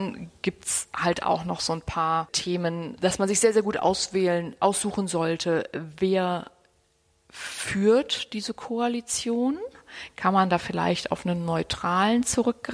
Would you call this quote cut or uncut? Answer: uncut